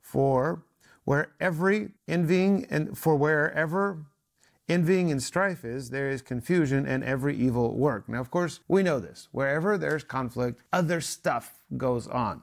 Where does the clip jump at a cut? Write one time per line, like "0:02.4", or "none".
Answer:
0:02.0
0:08.6
0:10.7